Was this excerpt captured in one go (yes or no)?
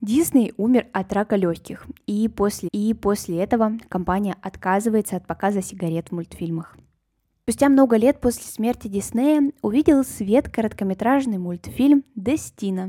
no